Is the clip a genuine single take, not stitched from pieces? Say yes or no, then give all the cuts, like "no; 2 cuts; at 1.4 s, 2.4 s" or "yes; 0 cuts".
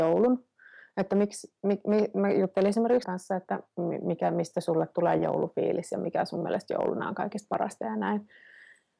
no; 1 cut; at 3.0 s